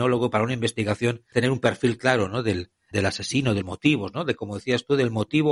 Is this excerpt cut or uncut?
cut